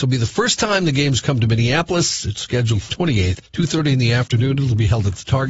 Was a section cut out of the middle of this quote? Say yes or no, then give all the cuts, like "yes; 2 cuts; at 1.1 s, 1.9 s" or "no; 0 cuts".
yes; 2 cuts; at 2.9 s, 3.5 s